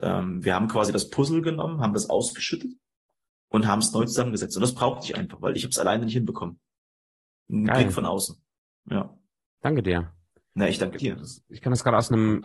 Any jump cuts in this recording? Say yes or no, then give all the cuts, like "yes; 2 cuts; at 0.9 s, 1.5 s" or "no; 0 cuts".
no; 0 cuts